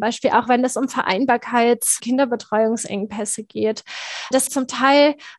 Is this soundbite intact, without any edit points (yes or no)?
no